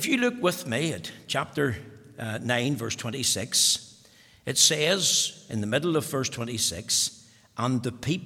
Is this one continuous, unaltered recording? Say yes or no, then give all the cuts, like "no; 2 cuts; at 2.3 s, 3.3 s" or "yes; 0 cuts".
yes; 0 cuts